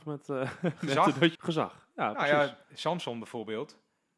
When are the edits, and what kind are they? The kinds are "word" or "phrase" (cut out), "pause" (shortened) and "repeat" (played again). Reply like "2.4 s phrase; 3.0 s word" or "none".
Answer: 1.4 s phrase; 2.6 s pause